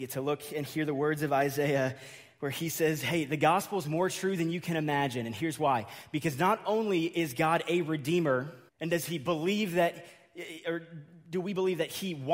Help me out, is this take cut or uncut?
cut